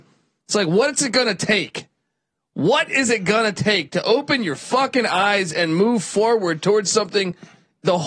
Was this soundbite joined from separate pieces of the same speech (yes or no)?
no